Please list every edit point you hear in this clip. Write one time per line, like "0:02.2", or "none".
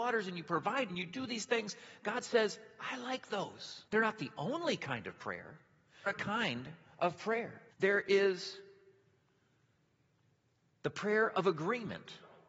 0:00.9
0:03.9
0:06.1
0:07.7